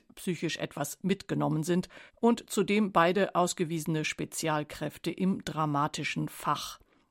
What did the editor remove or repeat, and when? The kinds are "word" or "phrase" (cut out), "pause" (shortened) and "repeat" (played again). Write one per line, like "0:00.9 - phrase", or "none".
0:02.1 - pause